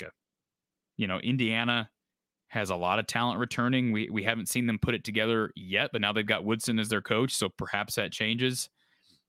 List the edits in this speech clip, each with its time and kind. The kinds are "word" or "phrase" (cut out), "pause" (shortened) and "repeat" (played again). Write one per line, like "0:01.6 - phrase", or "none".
none